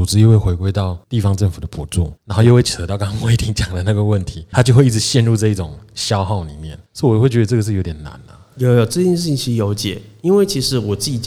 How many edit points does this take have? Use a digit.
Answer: 3